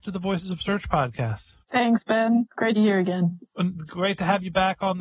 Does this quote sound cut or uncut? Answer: cut